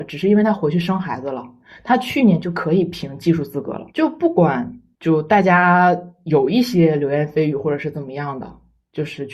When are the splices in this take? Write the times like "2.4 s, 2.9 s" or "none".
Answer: 3.9 s